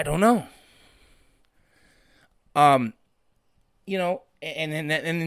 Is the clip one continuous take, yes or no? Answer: yes